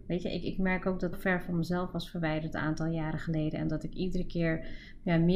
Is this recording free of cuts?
no; 1 cut; at 1.1 s

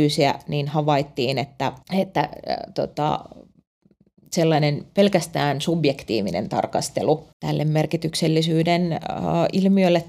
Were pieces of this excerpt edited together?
yes; 2 cuts; at 1.8 s, 7.3 s

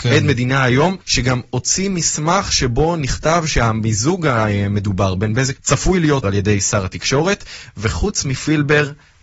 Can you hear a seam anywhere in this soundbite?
yes; 3 cuts; at 1.0 s, 5.6 s, 6.2 s

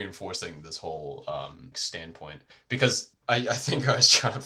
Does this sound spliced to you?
yes; 1 cut; at 1.7 s

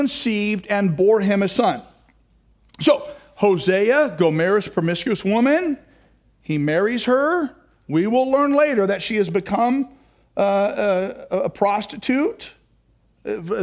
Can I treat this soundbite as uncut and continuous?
yes; 0 cuts

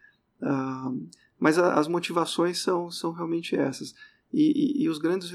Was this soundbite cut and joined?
no; 0 cuts

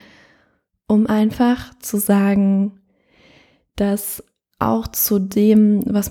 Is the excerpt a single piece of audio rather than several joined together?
yes; 0 cuts

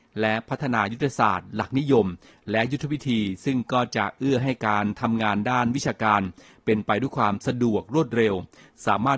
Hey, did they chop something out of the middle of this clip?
no; 0 cuts

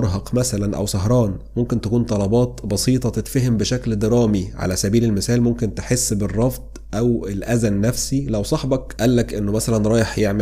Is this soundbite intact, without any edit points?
yes; 0 cuts

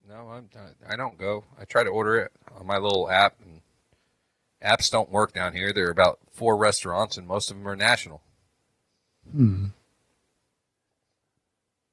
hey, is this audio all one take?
yes; 0 cuts

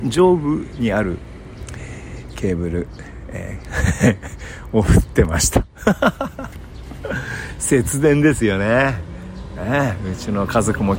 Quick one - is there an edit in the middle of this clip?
yes; 1 cut; at 2.3 s

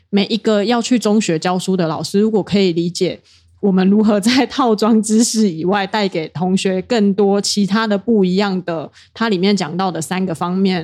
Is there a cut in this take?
no; 0 cuts

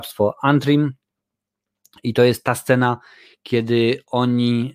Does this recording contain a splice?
no; 0 cuts

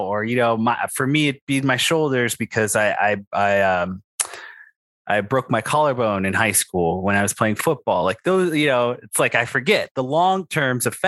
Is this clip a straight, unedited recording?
yes; 0 cuts

